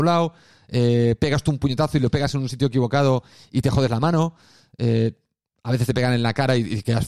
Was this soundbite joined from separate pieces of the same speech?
no; 0 cuts

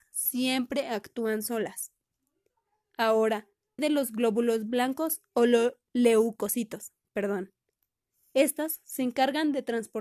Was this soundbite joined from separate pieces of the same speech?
yes; 1 cut; at 3.8 s

